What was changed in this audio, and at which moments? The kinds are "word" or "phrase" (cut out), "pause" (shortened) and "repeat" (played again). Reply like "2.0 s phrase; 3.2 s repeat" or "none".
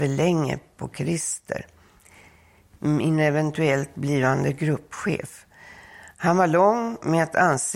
none